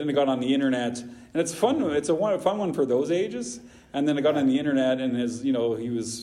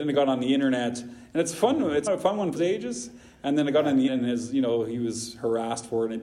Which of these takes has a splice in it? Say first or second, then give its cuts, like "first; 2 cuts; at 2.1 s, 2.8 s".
second; 3 cuts; at 2.1 s, 2.6 s, 4.1 s